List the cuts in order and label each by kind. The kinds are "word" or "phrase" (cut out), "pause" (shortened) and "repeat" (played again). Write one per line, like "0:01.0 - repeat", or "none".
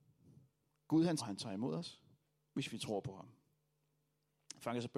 0:01.2 - phrase